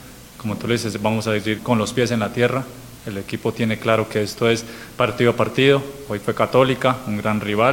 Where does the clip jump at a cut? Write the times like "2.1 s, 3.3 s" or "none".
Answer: 1.6 s